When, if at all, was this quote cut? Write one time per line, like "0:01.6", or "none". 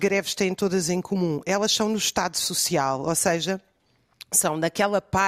none